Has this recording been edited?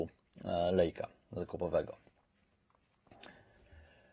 no; 0 cuts

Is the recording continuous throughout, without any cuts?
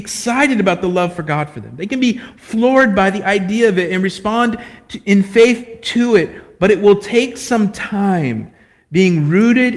yes; 0 cuts

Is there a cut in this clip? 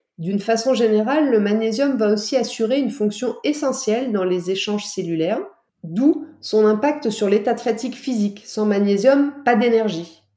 no; 0 cuts

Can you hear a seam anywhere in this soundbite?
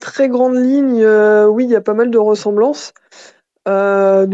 no; 0 cuts

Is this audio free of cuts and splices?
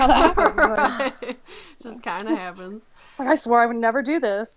yes; 0 cuts

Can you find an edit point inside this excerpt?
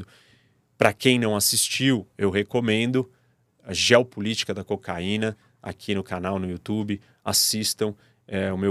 no; 0 cuts

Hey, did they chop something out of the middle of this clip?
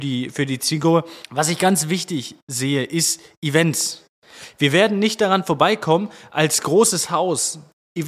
yes; 1 cut; at 1.2 s

